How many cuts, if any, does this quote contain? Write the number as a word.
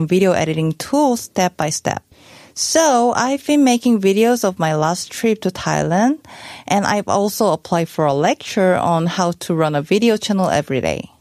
zero